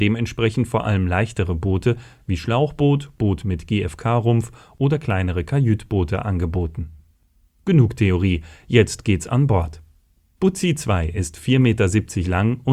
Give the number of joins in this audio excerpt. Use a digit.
0